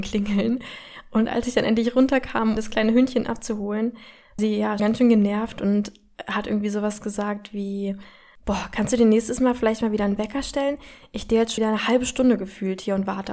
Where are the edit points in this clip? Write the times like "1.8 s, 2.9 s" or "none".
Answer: 2.6 s, 4.4 s, 4.8 s, 11.6 s